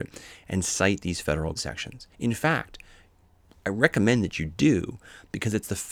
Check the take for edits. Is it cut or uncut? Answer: cut